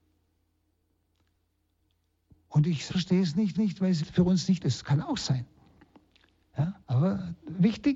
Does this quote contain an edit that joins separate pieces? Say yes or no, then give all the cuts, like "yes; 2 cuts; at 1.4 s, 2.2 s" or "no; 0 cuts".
yes; 5 cuts; at 2.9 s, 3.5 s, 4.0 s, 4.6 s, 6.8 s